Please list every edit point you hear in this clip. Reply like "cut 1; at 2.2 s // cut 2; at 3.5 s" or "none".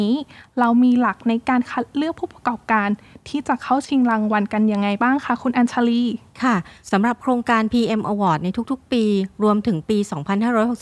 none